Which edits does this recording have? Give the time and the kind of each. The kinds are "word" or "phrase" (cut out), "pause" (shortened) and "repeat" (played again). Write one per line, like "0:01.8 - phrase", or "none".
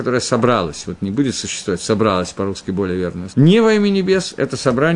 0:03.3 - word